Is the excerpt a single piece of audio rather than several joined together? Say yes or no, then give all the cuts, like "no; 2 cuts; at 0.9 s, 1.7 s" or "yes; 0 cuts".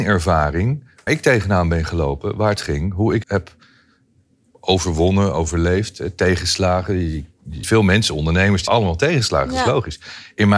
no; 5 cuts; at 1.1 s, 2.6 s, 3.2 s, 7.6 s, 8.7 s